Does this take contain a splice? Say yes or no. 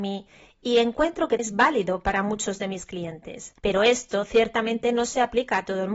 yes